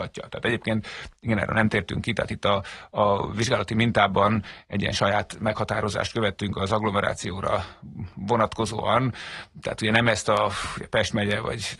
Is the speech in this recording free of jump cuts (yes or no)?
yes